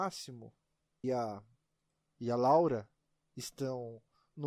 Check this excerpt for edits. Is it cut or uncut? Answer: cut